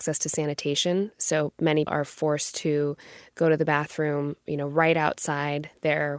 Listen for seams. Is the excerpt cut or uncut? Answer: cut